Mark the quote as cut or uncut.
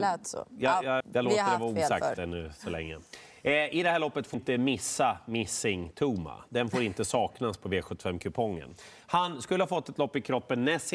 cut